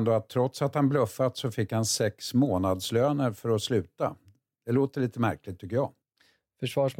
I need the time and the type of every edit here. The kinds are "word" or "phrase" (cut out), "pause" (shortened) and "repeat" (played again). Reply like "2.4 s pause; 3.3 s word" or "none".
none